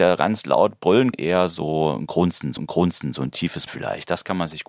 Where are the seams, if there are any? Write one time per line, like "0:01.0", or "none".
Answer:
0:01.1
0:02.6
0:03.7